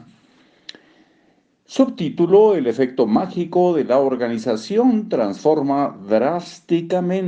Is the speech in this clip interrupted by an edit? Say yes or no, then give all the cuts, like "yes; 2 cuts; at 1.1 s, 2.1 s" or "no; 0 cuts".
no; 0 cuts